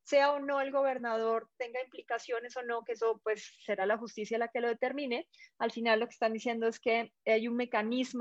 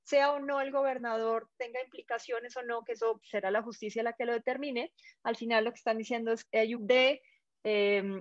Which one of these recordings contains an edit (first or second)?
second